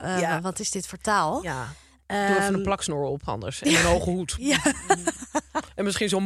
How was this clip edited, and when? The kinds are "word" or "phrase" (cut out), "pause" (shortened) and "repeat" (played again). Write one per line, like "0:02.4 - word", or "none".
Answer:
none

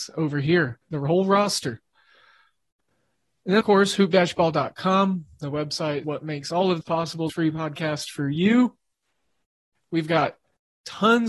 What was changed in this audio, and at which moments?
0:03.6 - word
0:06.0 - word
0:06.8 - word
0:07.3 - word

